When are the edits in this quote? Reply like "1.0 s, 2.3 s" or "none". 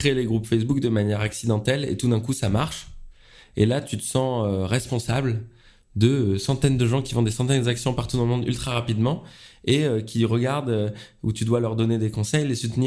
none